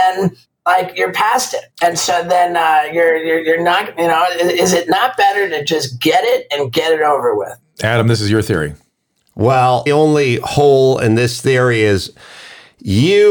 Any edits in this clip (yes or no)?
yes